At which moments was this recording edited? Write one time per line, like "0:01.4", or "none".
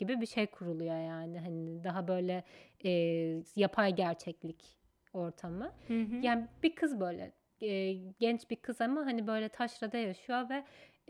none

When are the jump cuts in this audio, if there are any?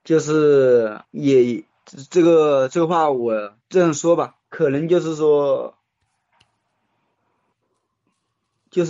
0:01.0
0:03.6
0:04.4

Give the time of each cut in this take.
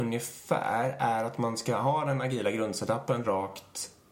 none

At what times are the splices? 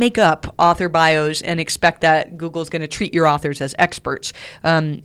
none

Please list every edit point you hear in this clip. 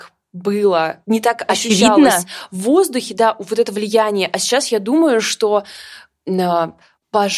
0:01.0

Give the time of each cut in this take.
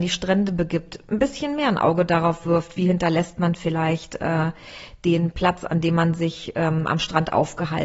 none

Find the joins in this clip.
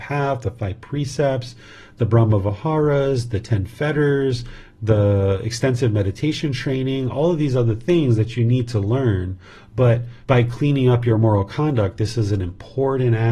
0:10.2

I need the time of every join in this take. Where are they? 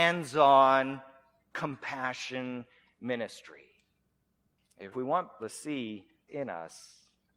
0:04.9
0:05.4
0:06.3

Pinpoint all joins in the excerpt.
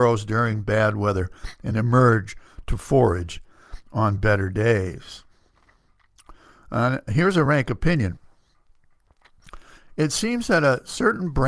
none

